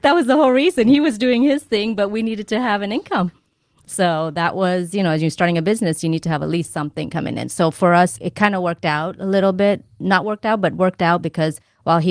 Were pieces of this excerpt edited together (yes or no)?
yes